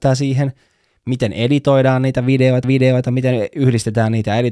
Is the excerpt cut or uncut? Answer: cut